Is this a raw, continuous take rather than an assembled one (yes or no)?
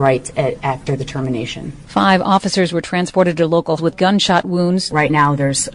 no